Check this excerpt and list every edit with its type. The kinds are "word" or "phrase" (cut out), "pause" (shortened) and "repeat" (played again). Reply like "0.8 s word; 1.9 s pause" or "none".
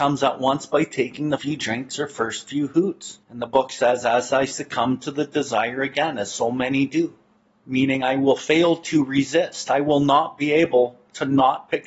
1.4 s word; 3.2 s pause; 7.4 s pause